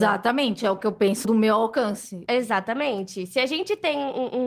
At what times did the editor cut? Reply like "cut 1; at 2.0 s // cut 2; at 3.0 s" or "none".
cut 1; at 1.2 s